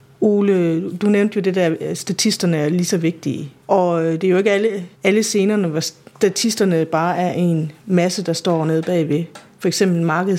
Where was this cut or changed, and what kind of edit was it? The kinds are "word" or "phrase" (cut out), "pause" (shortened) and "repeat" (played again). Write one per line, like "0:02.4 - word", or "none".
0:03.6 - pause
0:04.9 - pause
0:07.8 - pause